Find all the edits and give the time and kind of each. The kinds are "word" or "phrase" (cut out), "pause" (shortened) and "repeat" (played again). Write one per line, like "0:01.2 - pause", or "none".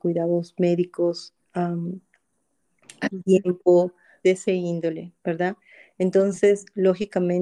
0:04.2 - word